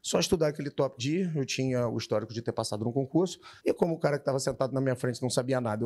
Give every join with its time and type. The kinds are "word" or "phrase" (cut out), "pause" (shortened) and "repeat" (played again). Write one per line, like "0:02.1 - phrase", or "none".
0:01.0 - word
0:03.6 - pause